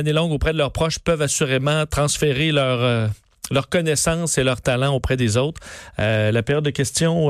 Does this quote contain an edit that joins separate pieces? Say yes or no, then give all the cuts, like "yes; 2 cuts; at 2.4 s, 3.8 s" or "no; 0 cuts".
no; 0 cuts